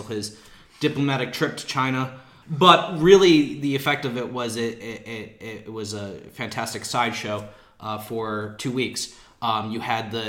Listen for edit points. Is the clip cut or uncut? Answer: uncut